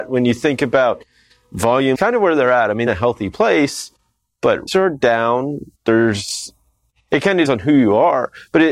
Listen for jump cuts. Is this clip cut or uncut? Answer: cut